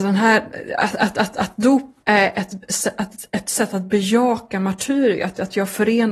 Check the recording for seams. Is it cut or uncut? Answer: cut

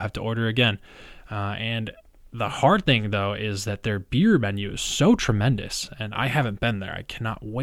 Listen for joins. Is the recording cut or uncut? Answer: uncut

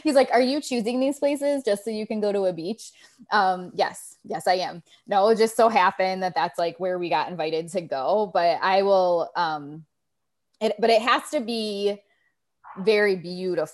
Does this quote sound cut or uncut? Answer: uncut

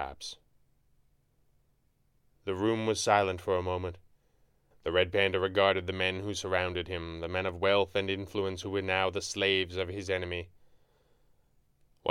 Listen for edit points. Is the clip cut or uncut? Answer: uncut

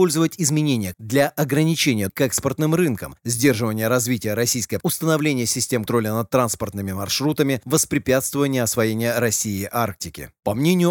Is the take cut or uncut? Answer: cut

